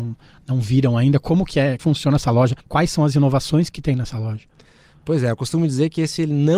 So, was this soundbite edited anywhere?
yes; 2 cuts; at 1.8 s, 2.6 s

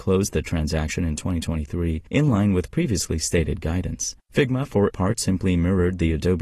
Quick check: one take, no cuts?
no; 3 cuts; at 2.1 s, 4.2 s, 4.9 s

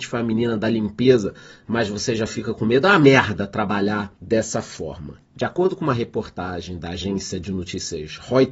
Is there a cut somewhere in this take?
yes; 2 cuts; at 4.2 s, 5.2 s

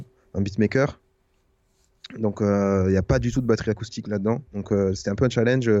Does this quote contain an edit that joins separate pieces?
yes; 1 cut; at 4.5 s

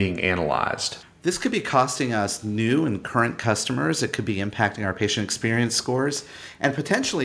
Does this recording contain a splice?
no; 0 cuts

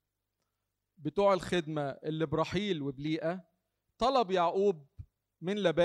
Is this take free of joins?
yes; 0 cuts

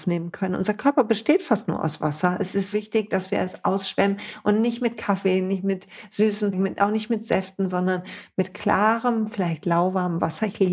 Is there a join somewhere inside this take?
yes; 2 cuts; at 2.7 s, 6.5 s

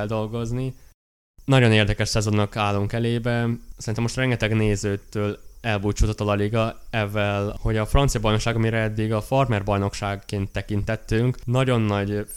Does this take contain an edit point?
no; 0 cuts

